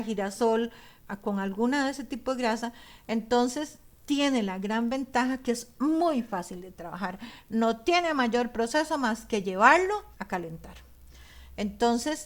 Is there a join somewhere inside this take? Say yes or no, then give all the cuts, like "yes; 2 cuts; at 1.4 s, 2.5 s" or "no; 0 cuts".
yes; 1 cut; at 10.1 s